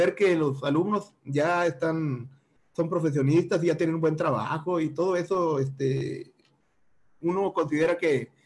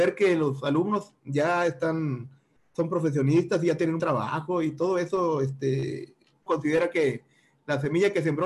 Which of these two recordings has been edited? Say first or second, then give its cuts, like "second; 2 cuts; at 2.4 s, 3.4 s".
second; 2 cuts; at 4.0 s, 6.5 s